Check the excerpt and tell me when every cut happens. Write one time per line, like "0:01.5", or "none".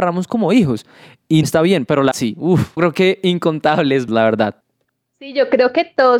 0:01.4
0:02.1
0:02.8
0:04.1